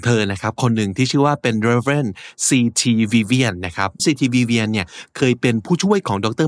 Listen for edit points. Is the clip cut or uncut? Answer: cut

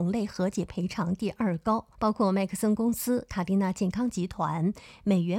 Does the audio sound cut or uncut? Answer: cut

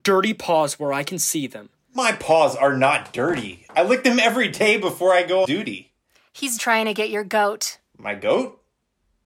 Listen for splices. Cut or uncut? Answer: cut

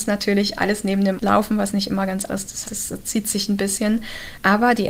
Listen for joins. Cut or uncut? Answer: cut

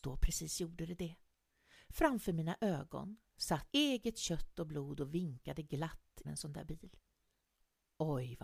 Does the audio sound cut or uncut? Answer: cut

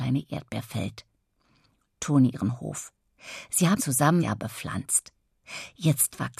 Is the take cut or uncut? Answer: cut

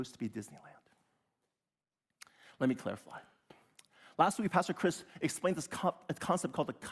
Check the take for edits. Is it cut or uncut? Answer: uncut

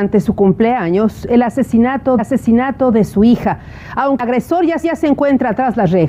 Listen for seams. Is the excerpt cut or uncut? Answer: cut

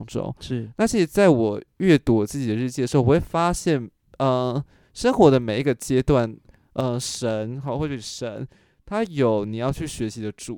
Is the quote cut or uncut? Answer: uncut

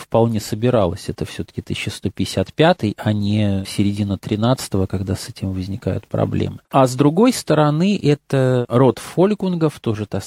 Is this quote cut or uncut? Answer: cut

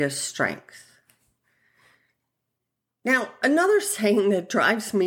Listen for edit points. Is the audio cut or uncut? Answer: uncut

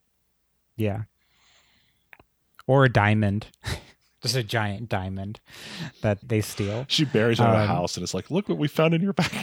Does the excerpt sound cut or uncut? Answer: cut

